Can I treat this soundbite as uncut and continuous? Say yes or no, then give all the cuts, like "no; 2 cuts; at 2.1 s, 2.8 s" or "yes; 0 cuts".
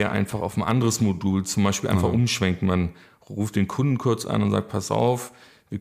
yes; 0 cuts